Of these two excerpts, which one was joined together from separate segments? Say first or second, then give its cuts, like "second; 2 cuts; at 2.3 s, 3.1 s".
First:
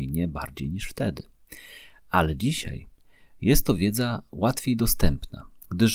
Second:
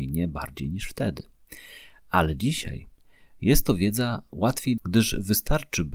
second; 1 cut; at 4.8 s